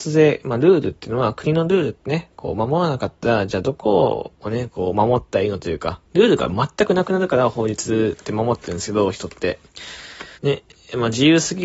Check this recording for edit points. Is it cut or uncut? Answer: cut